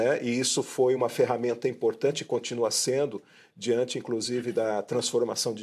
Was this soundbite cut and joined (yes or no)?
no